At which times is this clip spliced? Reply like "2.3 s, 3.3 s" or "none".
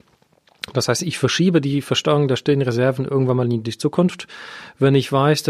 none